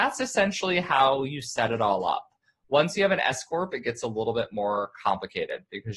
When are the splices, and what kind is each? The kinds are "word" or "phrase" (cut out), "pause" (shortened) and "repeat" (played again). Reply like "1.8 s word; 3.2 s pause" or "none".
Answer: none

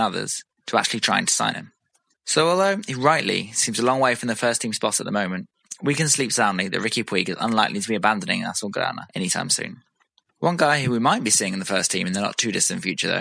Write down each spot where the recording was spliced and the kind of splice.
none

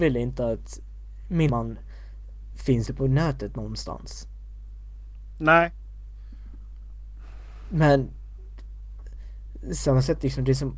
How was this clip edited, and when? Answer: 1.5 s word; 2.9 s word

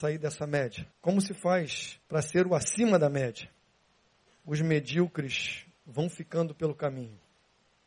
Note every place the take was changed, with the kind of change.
0.9 s pause; 2.0 s pause; 3.8 s pause

